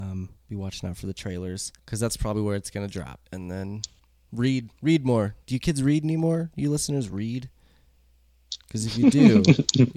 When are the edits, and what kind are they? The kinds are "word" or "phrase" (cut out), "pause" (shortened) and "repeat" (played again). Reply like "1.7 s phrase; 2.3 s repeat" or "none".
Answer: 1.8 s pause; 3.3 s pause

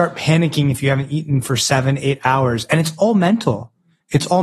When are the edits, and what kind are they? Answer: none

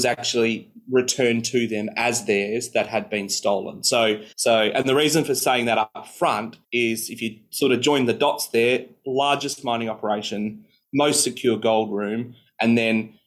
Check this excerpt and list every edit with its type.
4.3 s pause; 6.6 s pause

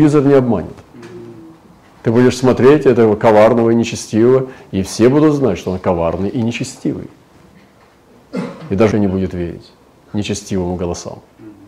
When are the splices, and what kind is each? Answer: 8.9 s word

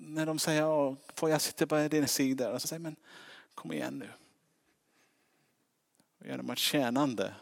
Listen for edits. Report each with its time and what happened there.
2.1 s word; 2.6 s word

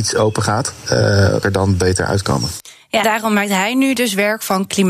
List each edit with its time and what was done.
1.4 s phrase; 3.0 s word

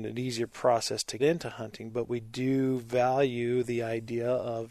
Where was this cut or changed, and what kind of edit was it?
1.2 s word

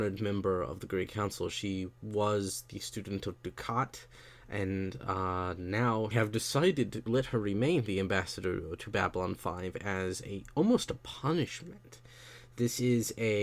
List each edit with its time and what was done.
6.1 s phrase; 7.1 s word

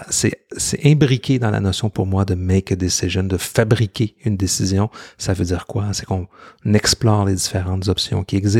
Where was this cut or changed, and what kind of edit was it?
none

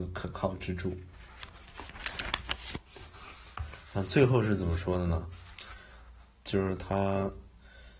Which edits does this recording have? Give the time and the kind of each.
none

